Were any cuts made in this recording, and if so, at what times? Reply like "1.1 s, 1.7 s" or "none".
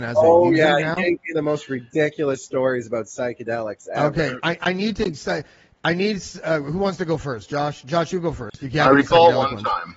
none